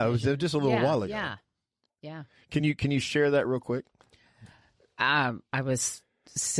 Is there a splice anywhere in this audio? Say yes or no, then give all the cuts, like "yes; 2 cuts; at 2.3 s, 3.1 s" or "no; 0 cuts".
no; 0 cuts